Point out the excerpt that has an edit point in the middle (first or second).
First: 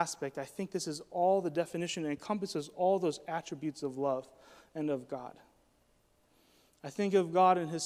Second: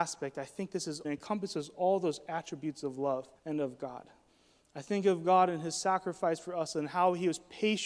second